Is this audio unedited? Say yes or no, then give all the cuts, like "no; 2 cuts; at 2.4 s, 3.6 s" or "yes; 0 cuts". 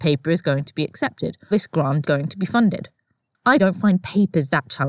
no; 3 cuts; at 1.5 s, 2.0 s, 3.6 s